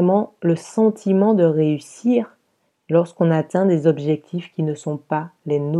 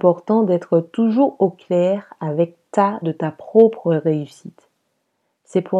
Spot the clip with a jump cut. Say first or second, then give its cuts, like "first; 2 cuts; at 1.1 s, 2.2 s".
second; 1 cut; at 3.0 s